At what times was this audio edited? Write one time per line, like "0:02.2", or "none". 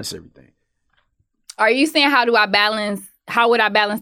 none